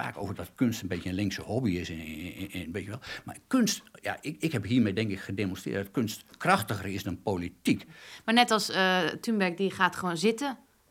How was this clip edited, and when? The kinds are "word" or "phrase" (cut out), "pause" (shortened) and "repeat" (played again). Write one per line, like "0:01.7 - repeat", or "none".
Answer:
none